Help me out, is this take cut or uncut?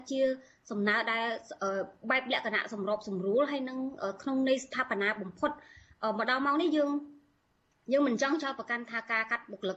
uncut